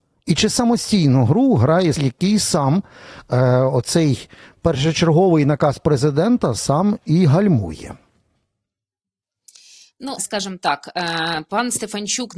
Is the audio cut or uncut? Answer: cut